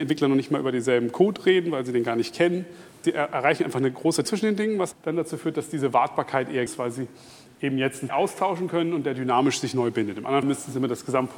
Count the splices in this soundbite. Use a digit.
6